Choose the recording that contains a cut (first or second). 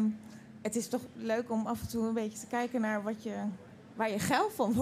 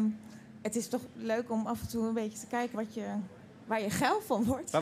second